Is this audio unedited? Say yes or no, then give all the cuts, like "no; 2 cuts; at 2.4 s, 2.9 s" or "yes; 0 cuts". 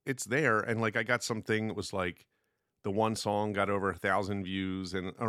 yes; 0 cuts